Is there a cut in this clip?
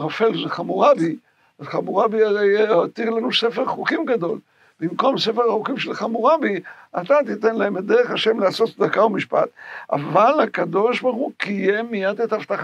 no; 0 cuts

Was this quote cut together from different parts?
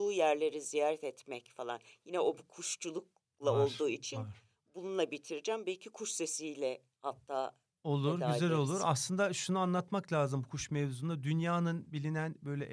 no; 0 cuts

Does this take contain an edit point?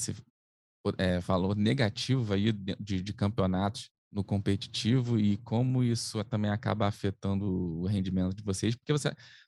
yes; 1 cut; at 4.0 s

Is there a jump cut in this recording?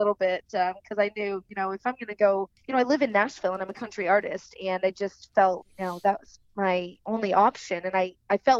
yes; 2 cuts; at 2.6 s, 5.6 s

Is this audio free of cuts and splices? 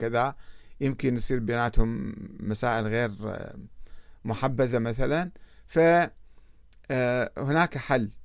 yes; 0 cuts

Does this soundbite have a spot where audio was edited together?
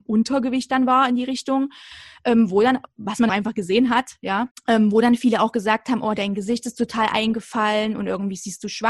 yes; 2 cuts; at 3.3 s, 4.5 s

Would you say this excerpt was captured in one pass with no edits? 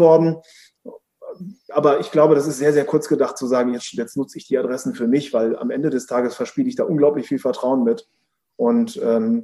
yes; 0 cuts

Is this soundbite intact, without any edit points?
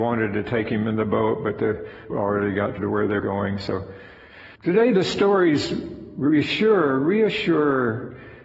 no; 4 cuts; at 2.1 s, 2.8 s, 3.2 s, 4.5 s

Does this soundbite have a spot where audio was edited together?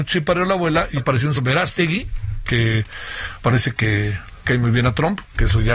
yes; 4 cuts; at 1.0 s, 1.4 s, 3.4 s, 4.4 s

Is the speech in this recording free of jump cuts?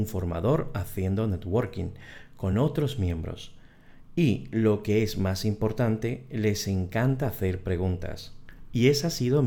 yes; 0 cuts

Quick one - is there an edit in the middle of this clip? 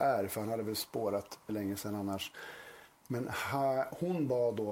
yes; 1 cut; at 1.5 s

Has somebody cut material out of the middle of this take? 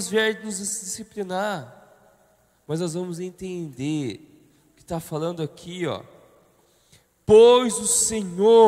no; 0 cuts

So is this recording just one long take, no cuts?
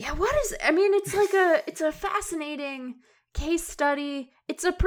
yes; 0 cuts

